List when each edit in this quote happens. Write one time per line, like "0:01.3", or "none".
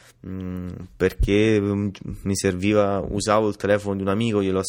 none

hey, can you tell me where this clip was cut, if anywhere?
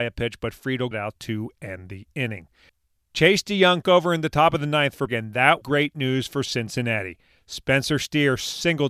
0:00.9
0:03.8
0:05.1
0:05.6

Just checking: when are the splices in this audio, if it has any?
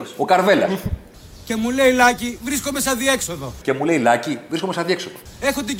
none

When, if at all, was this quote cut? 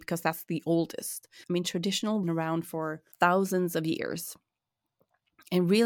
0:01.4
0:02.2
0:03.1

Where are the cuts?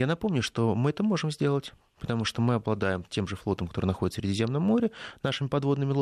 none

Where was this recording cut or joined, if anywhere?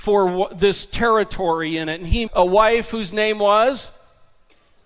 0:02.3

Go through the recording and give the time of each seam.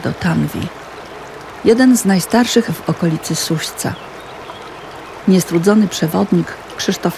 0:02.7

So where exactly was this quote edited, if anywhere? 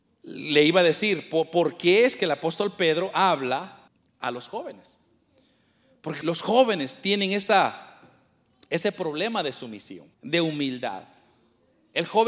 0:03.9
0:06.2
0:10.1

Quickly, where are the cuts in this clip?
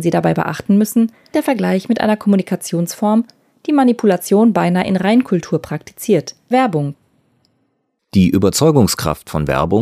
0:01.3
0:06.5

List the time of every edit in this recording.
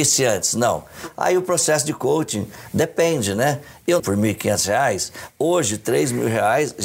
0:04.0

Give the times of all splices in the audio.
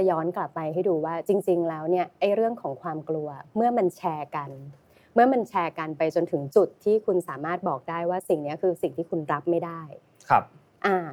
none

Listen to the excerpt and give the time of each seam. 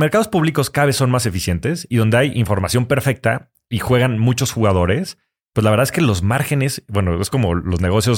none

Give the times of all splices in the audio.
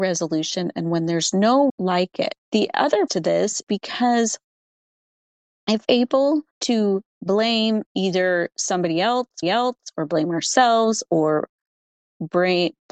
0:01.7
0:02.4
0:03.1
0:03.6
0:05.8
0:06.5
0:07.9
0:09.4

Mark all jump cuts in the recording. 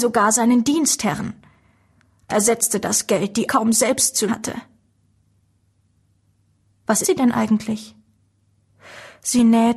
0:02.3
0:03.5
0:04.3
0:07.0

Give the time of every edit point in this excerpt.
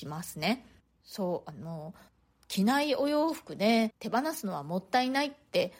0:03.9

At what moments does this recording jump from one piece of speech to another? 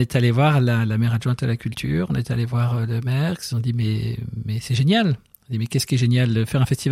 none

